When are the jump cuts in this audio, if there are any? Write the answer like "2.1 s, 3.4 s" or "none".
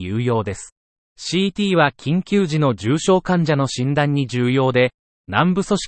1.0 s